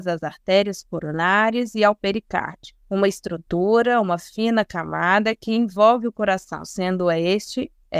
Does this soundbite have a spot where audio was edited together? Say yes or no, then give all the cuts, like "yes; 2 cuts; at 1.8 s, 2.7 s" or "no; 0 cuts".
yes; 1 cut; at 2.8 s